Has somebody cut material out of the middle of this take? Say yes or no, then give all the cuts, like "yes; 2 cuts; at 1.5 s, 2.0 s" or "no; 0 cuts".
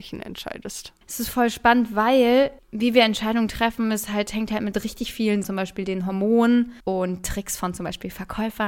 yes; 4 cuts; at 1.0 s, 2.6 s, 5.4 s, 6.8 s